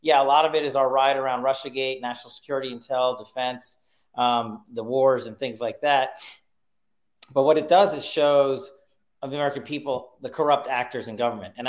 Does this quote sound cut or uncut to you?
uncut